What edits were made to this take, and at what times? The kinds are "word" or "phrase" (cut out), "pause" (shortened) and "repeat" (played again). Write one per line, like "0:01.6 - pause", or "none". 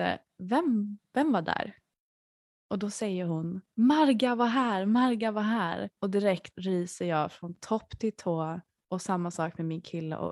0:03.7 - pause
0:06.0 - pause
0:06.5 - word